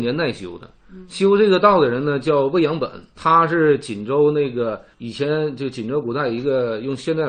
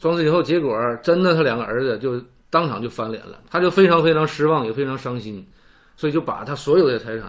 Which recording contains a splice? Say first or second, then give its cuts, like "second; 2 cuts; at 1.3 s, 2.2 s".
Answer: first; 2 cuts; at 3.1 s, 4.9 s